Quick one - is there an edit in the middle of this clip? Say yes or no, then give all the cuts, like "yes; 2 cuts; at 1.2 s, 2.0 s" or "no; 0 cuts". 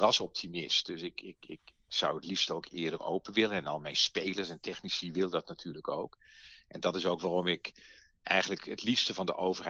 no; 0 cuts